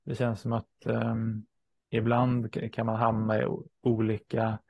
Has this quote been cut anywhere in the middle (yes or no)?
no